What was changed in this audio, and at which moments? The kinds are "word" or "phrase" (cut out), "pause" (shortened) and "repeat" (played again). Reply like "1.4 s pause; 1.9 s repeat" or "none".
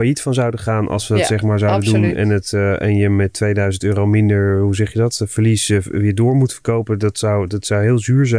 none